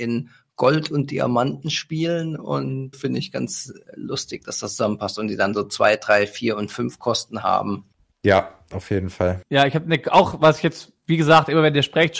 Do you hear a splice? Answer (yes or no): yes